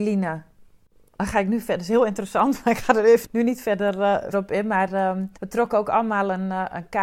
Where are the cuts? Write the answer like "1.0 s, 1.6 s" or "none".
3.2 s, 4.3 s, 5.4 s